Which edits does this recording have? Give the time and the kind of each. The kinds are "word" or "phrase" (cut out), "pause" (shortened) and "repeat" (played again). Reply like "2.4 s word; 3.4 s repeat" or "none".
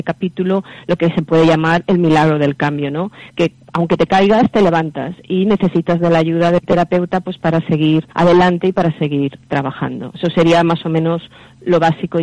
8.1 s pause